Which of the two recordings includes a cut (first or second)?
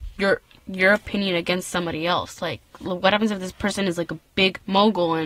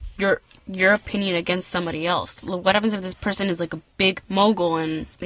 second